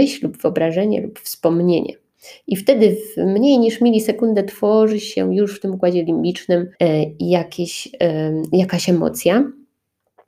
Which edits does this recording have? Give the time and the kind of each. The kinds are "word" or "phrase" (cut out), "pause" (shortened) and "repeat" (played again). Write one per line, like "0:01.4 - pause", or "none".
0:06.7 - pause